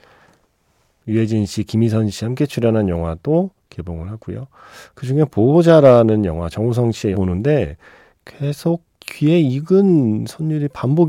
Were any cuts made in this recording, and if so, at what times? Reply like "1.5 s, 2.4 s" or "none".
7.1 s